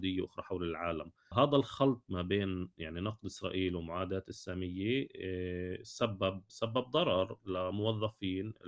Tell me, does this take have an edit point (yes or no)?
no